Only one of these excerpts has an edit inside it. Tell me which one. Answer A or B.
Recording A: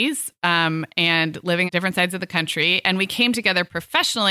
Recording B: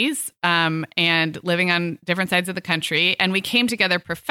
A